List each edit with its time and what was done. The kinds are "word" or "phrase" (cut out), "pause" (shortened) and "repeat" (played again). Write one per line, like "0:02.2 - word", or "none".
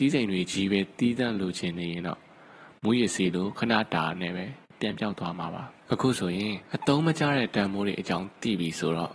0:05.8 - pause
0:06.6 - pause